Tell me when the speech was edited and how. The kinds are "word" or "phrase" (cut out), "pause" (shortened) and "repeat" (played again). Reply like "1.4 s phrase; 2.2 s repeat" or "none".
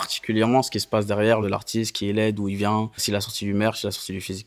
1.4 s word; 3.0 s word